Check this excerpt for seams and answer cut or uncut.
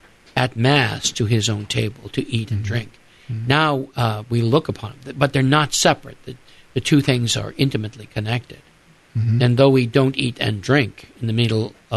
uncut